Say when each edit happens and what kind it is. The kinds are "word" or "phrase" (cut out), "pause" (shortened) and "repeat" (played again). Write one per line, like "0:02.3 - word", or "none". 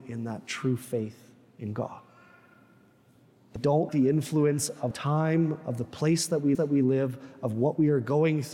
0:03.6 - word
0:03.9 - word
0:04.9 - word
0:06.5 - repeat